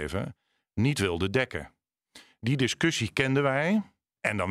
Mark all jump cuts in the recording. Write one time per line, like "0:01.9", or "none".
none